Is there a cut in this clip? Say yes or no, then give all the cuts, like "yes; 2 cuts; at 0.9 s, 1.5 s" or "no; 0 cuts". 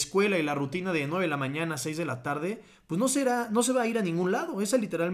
no; 0 cuts